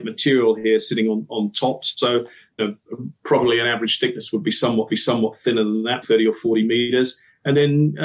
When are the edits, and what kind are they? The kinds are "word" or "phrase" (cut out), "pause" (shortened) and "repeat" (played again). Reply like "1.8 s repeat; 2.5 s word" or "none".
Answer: 2.6 s word; 3.1 s pause; 4.9 s repeat; 6.0 s word